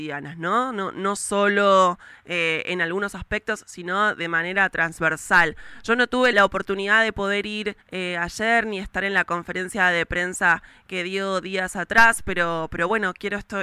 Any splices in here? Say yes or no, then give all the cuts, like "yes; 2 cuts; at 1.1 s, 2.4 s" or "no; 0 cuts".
yes; 2 cuts; at 6.3 s, 7.8 s